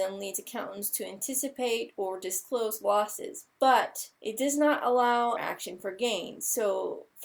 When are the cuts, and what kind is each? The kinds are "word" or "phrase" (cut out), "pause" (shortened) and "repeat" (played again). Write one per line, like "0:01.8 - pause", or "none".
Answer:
0:04.2 - pause
0:05.4 - phrase